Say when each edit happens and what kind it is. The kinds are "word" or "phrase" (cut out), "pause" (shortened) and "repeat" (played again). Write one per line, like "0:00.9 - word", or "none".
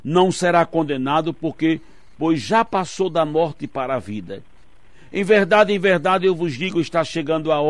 none